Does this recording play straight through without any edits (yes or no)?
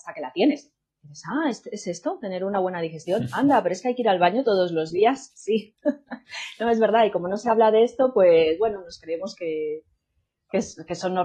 yes